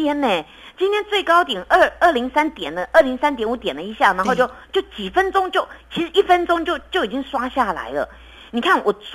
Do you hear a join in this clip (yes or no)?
no